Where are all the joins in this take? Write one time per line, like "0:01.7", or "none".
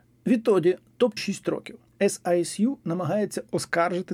0:01.2
0:01.9